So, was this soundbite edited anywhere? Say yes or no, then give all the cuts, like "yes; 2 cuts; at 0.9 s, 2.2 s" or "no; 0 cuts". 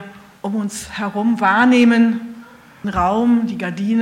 yes; 1 cut; at 2.8 s